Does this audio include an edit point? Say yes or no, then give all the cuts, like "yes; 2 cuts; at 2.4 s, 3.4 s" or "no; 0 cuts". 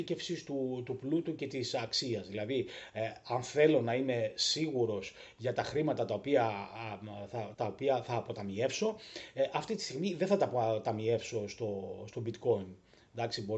yes; 1 cut; at 7.5 s